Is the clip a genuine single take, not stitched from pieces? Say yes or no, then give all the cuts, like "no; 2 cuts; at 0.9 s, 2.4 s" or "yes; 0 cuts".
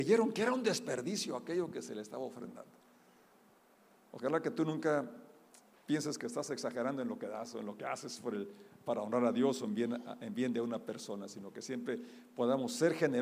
yes; 0 cuts